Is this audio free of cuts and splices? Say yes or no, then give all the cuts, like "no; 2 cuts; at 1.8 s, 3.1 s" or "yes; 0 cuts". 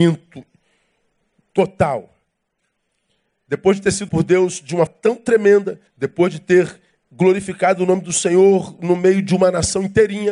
no; 3 cuts; at 4.1 s, 4.9 s, 5.9 s